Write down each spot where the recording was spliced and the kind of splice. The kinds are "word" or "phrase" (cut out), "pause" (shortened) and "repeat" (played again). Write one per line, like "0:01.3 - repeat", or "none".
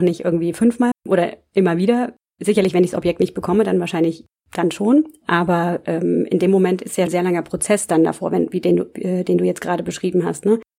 0:00.9 - word
0:07.1 - word